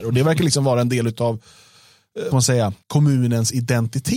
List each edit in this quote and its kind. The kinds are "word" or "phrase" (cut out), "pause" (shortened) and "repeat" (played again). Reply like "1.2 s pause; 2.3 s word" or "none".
2.3 s word; 2.8 s pause